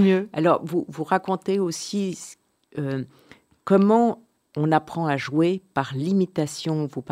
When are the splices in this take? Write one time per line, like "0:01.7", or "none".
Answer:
none